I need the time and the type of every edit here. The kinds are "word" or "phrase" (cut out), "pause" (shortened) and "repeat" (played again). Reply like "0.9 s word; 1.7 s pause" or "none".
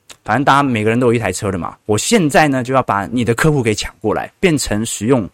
1.8 s pause